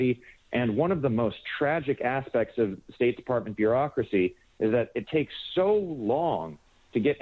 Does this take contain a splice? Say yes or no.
no